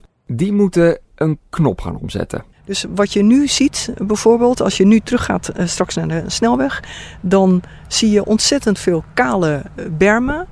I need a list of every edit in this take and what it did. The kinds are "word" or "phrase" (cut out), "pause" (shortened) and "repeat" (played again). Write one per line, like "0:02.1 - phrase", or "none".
0:01.0 - pause
0:02.5 - pause